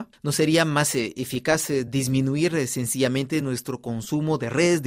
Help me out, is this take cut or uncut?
uncut